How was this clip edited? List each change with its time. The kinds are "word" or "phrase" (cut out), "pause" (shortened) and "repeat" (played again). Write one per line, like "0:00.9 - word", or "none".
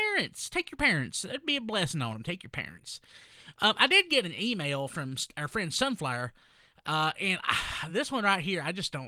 none